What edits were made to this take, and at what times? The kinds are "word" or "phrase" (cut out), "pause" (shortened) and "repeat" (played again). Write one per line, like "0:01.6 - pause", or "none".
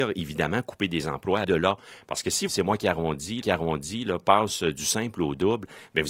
0:01.4 - word
0:02.5 - phrase
0:03.4 - repeat

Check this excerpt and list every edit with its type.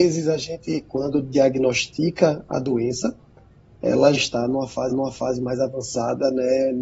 0:04.1 - word
0:04.9 - repeat

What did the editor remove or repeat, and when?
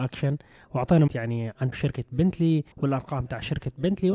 0:01.1 - word
0:01.7 - word
0:02.7 - pause

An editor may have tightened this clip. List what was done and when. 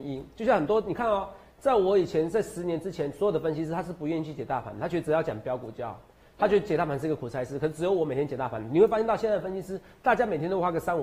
none

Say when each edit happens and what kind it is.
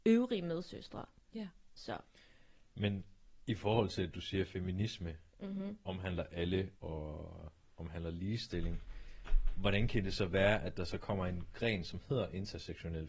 0:05.3 - pause
0:06.8 - pause

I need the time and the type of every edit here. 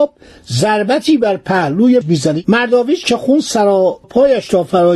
0:02.0 - word
0:04.0 - word

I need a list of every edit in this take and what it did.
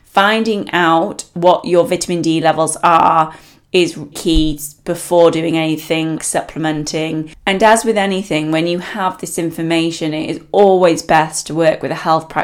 0:04.1 - word
0:06.2 - word

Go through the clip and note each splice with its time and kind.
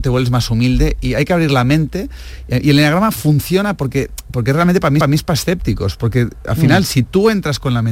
0:05.0 - repeat

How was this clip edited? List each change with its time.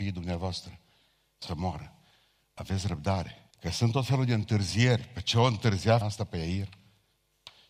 0:01.5 - word
0:03.5 - pause
0:06.0 - word

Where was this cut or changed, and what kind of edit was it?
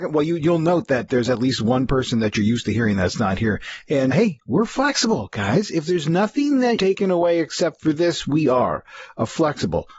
0:04.1 - word
0:06.8 - word

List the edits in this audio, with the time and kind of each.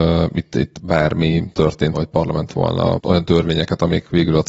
0:01.9 - word
0:02.5 - word
0:03.0 - word

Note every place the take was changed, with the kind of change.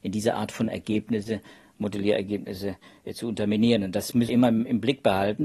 0:04.3 - word

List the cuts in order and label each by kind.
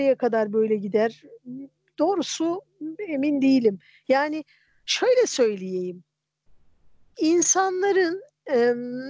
none

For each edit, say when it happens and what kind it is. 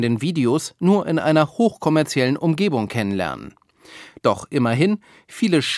none

